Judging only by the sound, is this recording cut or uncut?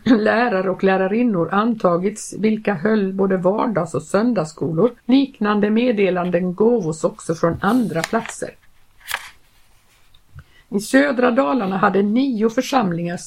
cut